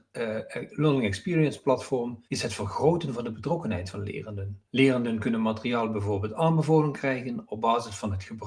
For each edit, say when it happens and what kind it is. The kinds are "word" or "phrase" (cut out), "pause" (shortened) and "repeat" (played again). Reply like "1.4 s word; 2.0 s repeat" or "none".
2.3 s pause; 4.7 s pause

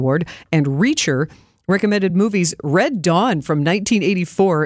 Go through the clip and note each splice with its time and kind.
none

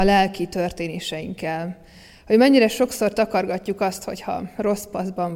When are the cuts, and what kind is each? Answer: none

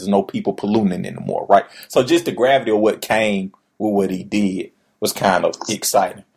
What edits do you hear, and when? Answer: none

